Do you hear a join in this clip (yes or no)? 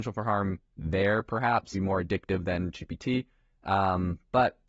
yes